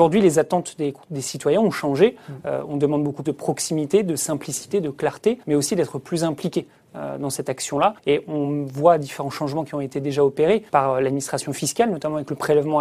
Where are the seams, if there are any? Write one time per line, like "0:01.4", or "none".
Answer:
0:03.2
0:05.4
0:08.0
0:10.7